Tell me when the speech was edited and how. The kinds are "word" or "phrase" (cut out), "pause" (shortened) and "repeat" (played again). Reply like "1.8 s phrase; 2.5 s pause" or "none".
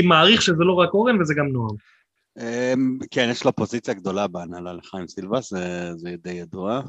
none